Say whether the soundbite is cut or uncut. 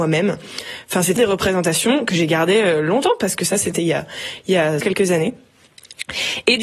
cut